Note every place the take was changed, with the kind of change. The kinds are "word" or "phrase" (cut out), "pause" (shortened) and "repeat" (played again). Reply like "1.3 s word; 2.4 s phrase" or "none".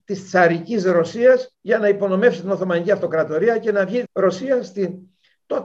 1.5 s pause; 4.0 s word